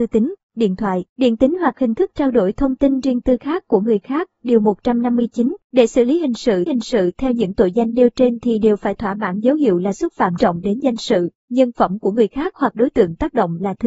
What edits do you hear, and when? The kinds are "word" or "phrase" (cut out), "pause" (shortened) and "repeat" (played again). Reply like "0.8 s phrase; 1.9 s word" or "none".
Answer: 1.1 s pause; 5.6 s pause; 6.7 s repeat; 10.4 s word